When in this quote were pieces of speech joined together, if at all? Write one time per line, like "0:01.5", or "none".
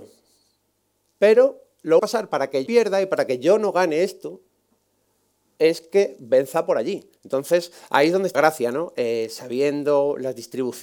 0:02.0
0:02.7
0:07.2
0:08.3